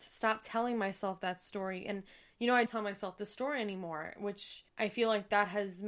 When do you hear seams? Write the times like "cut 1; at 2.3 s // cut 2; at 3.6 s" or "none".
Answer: cut 1; at 2.7 s // cut 2; at 4.7 s